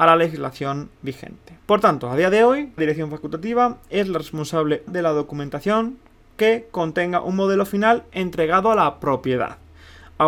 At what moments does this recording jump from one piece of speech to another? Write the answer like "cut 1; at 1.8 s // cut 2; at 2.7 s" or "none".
cut 1; at 0.9 s // cut 2; at 1.6 s // cut 3; at 2.8 s // cut 4; at 4.9 s